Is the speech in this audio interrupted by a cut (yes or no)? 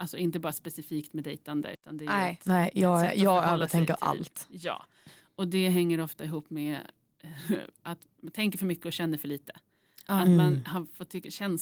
no